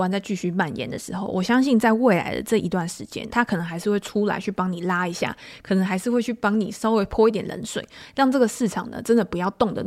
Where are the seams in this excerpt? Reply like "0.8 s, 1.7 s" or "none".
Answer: 3.3 s